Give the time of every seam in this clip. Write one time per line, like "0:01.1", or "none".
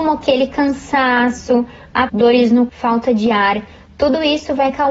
0:02.1
0:02.7